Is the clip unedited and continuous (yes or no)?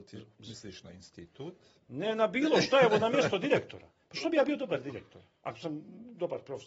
yes